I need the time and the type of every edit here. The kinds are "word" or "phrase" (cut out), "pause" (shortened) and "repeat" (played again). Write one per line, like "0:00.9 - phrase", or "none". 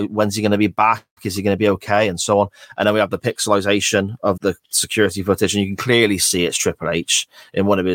0:04.4 - word

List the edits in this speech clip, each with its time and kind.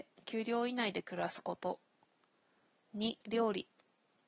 0:03.2 - pause

